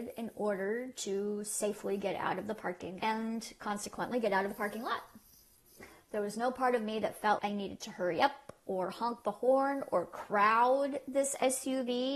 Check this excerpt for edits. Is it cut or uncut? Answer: cut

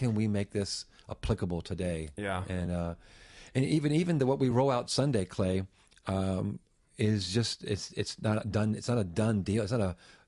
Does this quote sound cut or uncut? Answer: uncut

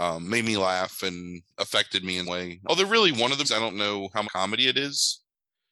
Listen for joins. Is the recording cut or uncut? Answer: cut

